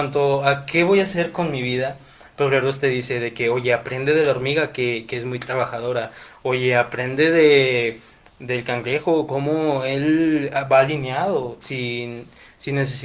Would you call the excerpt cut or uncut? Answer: uncut